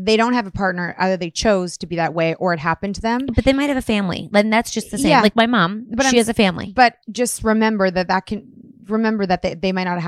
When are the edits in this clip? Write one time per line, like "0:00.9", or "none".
0:07.0